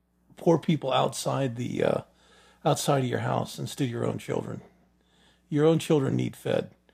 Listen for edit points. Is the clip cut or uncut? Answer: uncut